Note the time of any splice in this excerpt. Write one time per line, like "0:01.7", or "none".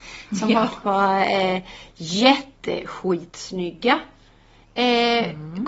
0:02.6

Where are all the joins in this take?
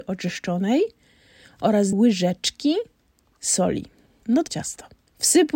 0:01.9
0:04.5

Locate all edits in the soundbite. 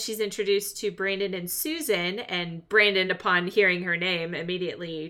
none

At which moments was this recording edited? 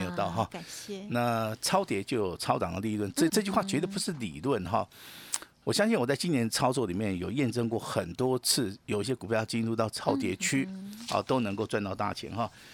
0:03.3

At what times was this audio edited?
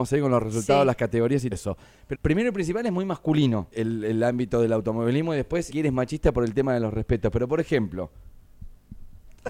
0:01.5
0:02.1
0:03.7
0:05.7

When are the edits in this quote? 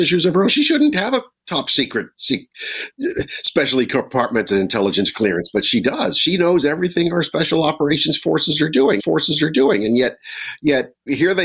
0:09.0

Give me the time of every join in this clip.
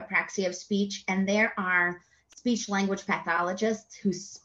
none

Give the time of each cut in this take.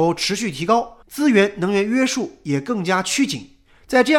0:01.0

